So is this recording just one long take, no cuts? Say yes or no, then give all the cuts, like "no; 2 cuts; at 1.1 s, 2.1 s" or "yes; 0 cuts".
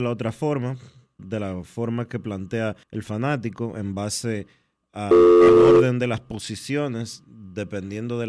no; 2 cuts; at 1.2 s, 2.8 s